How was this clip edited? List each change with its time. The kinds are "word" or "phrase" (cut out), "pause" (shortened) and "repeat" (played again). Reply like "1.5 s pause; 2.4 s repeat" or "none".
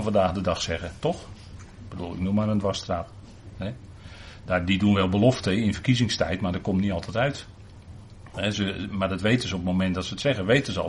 none